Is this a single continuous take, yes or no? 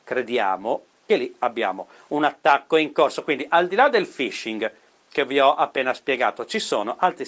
no